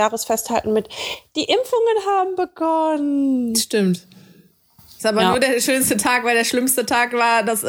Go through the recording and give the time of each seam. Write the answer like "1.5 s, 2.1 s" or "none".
none